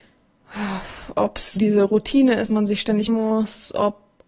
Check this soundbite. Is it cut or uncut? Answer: cut